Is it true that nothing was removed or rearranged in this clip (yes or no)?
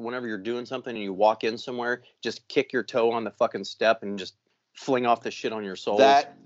yes